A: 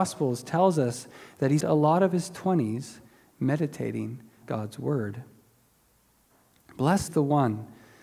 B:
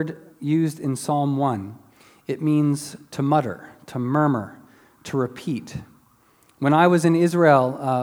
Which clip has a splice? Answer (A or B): A